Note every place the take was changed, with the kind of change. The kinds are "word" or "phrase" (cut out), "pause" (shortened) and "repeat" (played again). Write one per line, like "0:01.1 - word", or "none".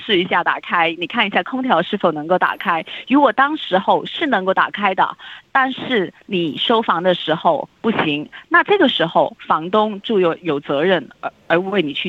0:07.7 - pause